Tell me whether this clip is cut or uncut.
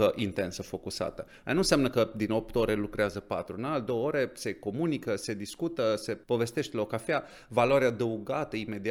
cut